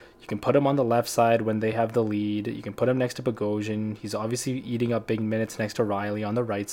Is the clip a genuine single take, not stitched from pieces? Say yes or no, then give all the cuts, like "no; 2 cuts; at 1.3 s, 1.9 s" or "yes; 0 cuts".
yes; 0 cuts